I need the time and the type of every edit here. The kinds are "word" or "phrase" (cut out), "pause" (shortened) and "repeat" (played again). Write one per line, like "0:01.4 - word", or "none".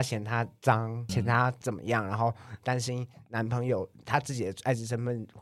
0:01.1 - word